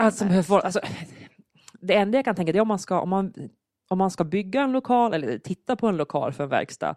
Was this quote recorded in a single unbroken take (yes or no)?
yes